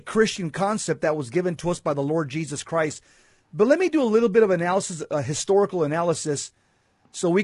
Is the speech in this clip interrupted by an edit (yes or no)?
no